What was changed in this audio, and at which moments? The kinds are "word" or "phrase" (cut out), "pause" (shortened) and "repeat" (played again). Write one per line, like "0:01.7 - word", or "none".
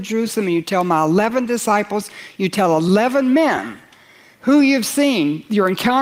none